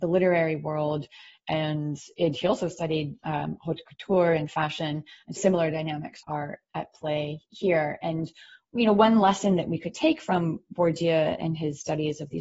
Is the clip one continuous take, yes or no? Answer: no